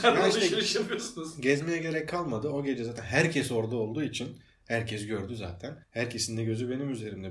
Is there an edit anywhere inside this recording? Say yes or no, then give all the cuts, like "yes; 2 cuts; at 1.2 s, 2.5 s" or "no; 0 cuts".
yes; 1 cut; at 5.8 s